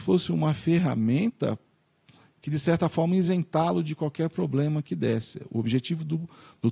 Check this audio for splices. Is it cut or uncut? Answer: uncut